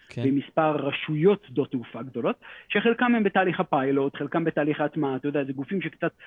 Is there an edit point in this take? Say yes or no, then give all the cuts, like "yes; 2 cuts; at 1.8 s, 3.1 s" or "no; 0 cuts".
no; 0 cuts